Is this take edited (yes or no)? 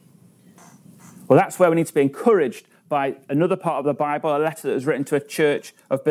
no